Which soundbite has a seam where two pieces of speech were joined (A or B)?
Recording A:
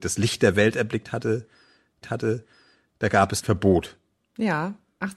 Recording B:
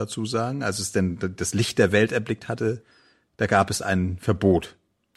A